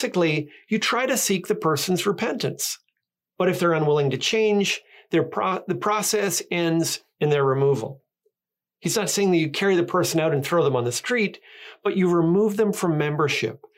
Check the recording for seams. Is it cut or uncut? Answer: uncut